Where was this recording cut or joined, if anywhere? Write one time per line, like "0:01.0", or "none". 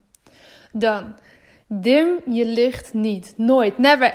none

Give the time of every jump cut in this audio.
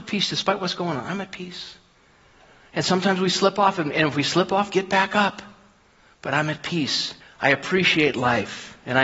0:07.2

